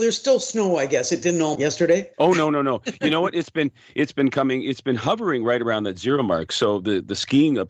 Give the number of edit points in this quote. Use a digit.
2